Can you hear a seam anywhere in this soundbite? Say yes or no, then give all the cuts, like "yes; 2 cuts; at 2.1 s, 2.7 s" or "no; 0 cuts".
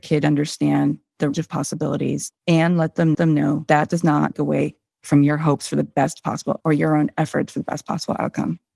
yes; 5 cuts; at 1.3 s, 2.4 s, 3.1 s, 4.3 s, 6.6 s